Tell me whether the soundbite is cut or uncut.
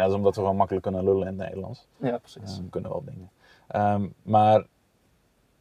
cut